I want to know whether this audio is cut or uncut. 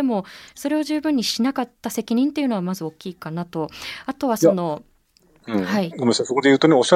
uncut